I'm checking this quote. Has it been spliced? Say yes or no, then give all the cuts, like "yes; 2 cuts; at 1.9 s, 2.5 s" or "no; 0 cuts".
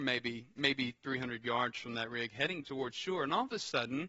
yes; 1 cut; at 2.6 s